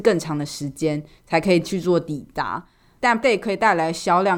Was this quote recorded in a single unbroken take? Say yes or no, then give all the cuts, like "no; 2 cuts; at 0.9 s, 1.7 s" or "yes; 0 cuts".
no; 1 cut; at 3.2 s